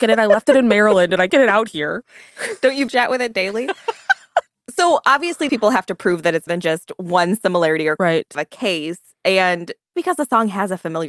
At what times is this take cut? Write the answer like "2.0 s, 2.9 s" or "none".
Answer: 1.3 s, 2.9 s, 4.6 s, 5.5 s, 6.5 s, 8.0 s, 8.3 s, 9.9 s